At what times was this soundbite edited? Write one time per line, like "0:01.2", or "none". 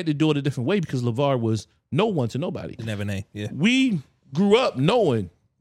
none

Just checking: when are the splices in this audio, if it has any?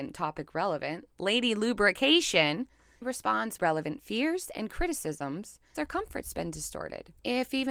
0:01.1
0:03.0
0:03.6
0:05.7

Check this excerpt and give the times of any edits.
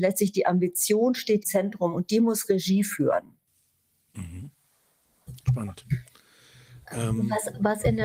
0:01.4

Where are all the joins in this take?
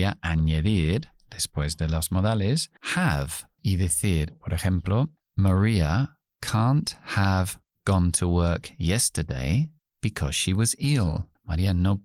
0:09.8

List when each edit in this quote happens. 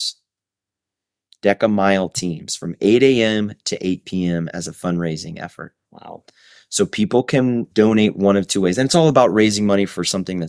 0:05.8
0:07.7

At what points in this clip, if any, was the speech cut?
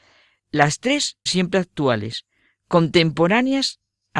0:01.3

